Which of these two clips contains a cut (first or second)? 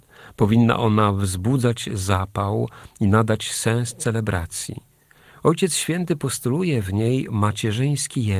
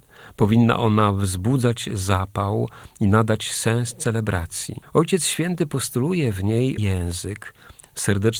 second